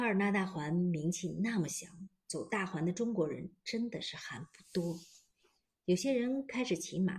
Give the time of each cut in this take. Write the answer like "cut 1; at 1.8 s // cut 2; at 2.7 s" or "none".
none